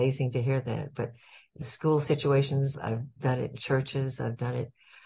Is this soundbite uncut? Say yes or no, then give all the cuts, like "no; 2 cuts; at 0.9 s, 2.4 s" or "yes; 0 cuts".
no; 2 cuts; at 1.6 s, 2.7 s